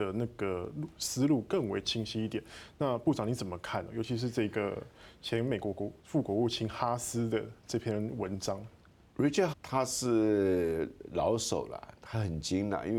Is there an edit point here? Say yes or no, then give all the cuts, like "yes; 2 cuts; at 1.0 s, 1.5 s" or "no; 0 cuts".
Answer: yes; 1 cut; at 9.5 s